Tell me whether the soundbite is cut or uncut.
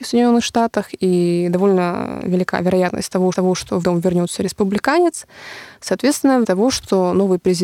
cut